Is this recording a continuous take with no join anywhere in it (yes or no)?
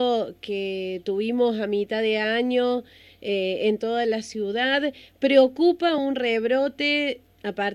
yes